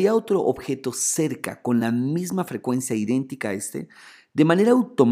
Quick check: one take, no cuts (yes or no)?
yes